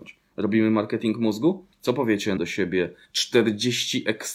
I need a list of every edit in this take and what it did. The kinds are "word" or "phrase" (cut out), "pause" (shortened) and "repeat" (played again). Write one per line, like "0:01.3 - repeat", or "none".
0:01.7 - pause
0:02.4 - phrase